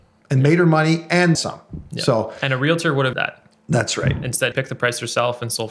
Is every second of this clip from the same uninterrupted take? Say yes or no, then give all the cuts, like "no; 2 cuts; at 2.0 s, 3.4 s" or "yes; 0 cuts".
no; 3 cuts; at 1.3 s, 3.1 s, 4.5 s